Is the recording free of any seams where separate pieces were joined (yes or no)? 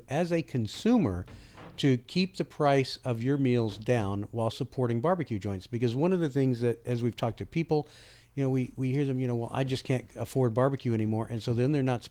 no